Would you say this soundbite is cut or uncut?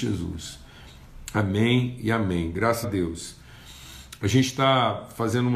cut